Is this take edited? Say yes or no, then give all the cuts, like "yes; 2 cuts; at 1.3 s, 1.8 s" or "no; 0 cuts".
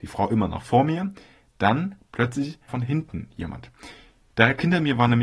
yes; 1 cut; at 2.7 s